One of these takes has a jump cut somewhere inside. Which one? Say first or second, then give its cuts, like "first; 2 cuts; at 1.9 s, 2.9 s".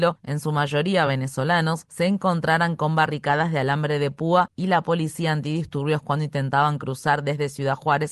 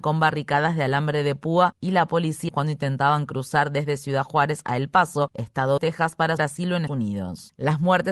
second; 4 cuts; at 2.5 s, 5.8 s, 6.4 s, 6.9 s